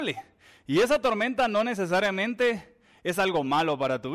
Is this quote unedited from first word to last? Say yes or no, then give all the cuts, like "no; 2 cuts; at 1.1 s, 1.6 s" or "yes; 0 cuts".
yes; 0 cuts